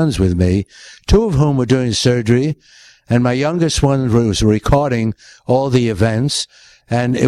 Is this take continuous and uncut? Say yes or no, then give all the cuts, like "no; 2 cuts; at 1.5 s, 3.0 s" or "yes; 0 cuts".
yes; 0 cuts